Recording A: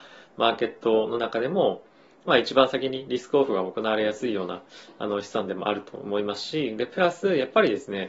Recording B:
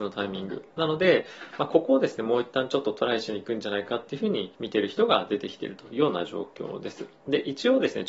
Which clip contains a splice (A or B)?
B